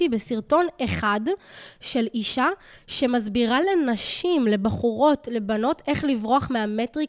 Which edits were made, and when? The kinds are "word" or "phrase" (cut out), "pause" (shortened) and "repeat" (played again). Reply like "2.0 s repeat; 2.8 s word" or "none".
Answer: none